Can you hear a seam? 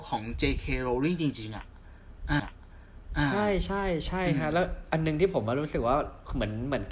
yes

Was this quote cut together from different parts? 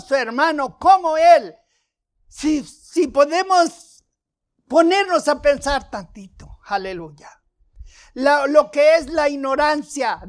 no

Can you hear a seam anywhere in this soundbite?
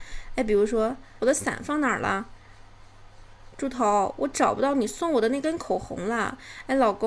yes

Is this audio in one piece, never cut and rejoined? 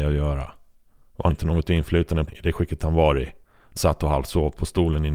no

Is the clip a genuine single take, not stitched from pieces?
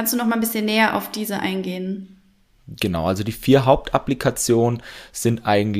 yes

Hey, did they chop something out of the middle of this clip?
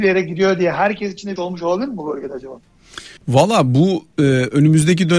yes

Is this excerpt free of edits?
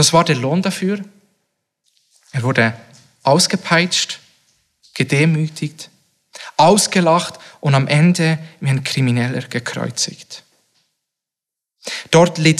yes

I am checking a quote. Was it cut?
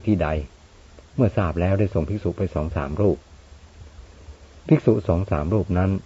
yes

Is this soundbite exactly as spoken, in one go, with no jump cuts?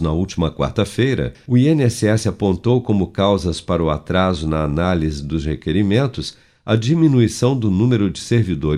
yes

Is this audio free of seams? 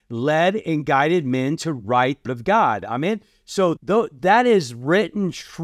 no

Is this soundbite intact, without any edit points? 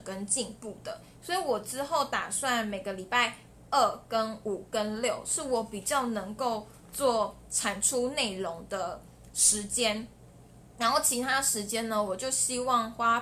yes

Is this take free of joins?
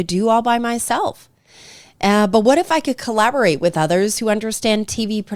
yes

